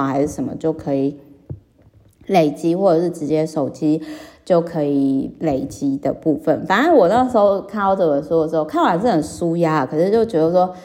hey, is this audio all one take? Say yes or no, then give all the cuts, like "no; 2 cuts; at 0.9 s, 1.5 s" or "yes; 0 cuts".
yes; 0 cuts